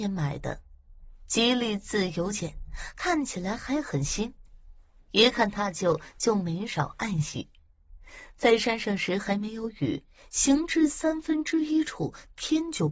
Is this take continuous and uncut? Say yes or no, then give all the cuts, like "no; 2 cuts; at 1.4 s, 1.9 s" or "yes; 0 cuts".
yes; 0 cuts